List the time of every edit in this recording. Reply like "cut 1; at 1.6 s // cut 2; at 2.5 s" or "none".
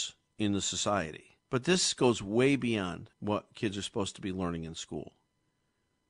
cut 1; at 1.4 s // cut 2; at 3.1 s